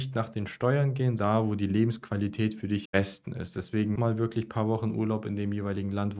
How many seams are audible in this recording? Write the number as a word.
three